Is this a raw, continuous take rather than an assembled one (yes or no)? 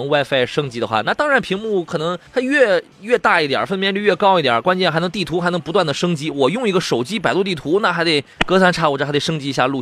no